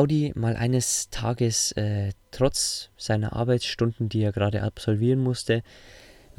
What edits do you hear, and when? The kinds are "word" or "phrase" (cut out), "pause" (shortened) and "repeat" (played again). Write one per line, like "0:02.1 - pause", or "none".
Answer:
none